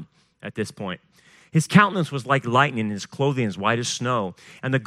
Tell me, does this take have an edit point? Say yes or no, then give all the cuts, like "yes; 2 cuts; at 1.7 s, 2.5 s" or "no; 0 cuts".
no; 0 cuts